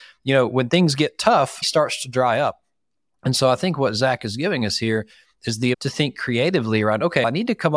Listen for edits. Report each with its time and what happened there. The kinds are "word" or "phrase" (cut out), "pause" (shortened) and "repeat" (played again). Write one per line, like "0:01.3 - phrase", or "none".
0:01.6 - word
0:05.7 - word